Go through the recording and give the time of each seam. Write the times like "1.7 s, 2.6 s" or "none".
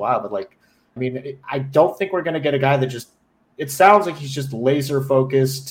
1.0 s